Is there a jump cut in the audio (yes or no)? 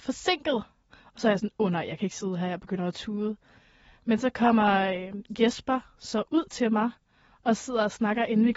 no